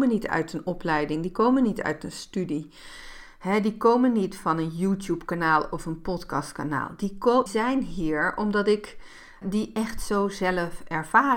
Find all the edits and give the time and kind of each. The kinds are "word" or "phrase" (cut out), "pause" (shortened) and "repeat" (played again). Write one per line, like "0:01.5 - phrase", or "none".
0:07.5 - word
0:09.4 - word